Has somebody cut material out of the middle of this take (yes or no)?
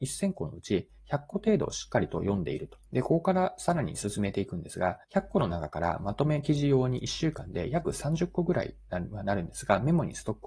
yes